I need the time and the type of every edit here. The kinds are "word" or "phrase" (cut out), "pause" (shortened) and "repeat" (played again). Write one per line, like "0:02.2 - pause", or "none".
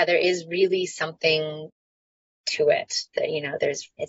none